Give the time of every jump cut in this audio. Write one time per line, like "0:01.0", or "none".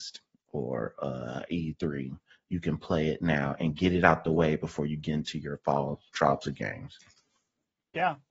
none